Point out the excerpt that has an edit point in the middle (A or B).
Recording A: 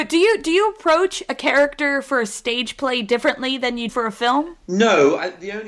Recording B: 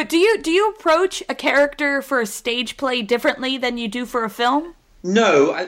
A